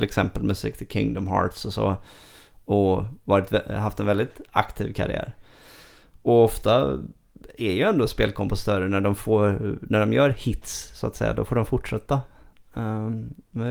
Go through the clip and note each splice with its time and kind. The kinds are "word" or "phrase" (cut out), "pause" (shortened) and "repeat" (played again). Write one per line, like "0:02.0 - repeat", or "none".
none